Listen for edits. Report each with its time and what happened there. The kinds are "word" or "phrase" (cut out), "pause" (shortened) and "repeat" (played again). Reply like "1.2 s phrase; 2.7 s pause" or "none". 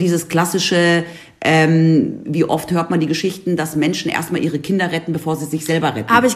2.2 s word

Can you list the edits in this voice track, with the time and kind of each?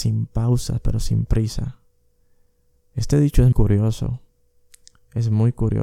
3.5 s word

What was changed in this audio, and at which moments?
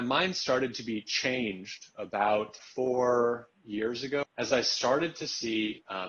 2.6 s word; 4.2 s phrase

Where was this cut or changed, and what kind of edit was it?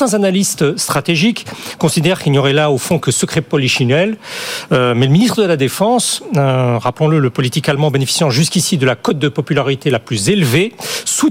none

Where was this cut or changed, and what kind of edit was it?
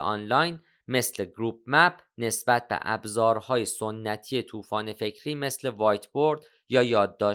none

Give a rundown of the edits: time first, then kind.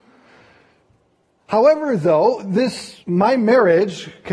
3.0 s pause

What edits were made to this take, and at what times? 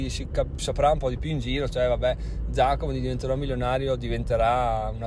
none

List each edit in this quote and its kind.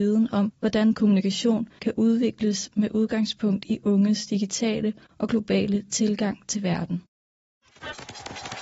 0.9 s word

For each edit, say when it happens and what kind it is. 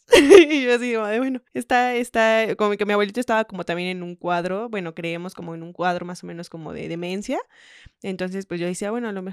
1.5 s pause

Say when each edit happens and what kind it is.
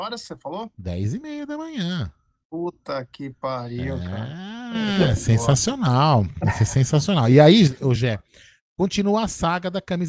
none

